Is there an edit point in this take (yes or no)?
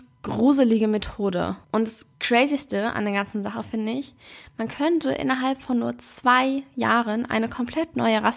yes